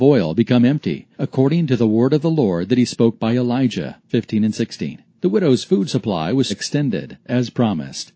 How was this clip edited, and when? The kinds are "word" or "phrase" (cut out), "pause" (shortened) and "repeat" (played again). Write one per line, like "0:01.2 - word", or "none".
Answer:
0:01.1 - pause
0:04.1 - word
0:05.1 - pause
0:06.5 - word